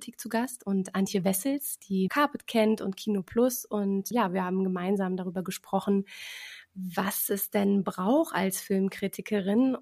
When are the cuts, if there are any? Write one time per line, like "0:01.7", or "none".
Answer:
0:02.1
0:04.1